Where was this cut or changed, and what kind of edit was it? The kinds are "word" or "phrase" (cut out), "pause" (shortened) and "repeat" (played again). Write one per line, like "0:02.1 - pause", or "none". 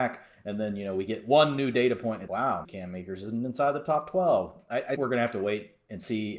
0:02.3 - word
0:02.6 - word
0:05.0 - word